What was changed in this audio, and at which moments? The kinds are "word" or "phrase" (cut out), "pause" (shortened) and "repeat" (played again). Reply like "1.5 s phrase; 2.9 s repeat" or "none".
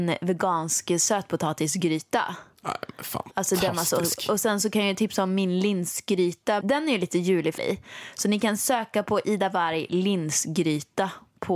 6.6 s word; 7.6 s phrase